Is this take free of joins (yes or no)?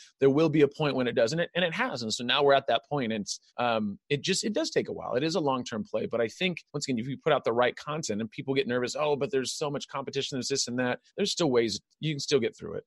no